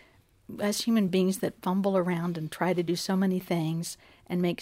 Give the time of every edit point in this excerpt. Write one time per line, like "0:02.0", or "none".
none